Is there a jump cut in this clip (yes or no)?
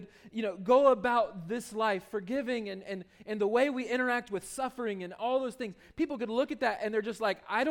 no